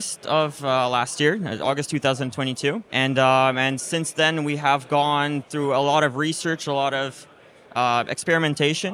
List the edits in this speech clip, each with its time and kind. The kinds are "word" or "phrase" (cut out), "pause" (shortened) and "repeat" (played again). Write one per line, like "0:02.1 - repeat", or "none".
0:02.9 - pause

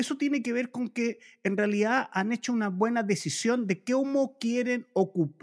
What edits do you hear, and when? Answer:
none

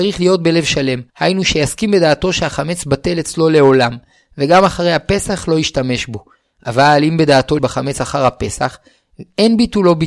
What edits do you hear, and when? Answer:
0:01.1 - pause
0:07.6 - word

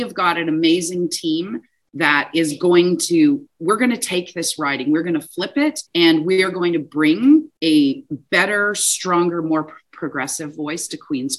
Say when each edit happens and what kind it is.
0:05.9 - pause
0:07.6 - pause

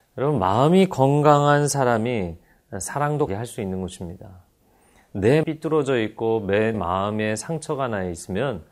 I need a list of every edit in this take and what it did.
0:03.3 - word
0:05.4 - word
0:06.7 - word

